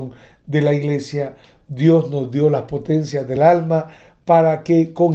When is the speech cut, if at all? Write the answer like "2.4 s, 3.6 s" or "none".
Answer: none